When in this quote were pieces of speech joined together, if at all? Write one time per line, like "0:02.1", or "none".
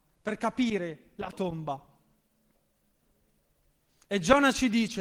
0:01.3